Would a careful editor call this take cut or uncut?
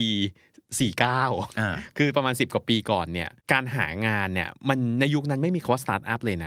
cut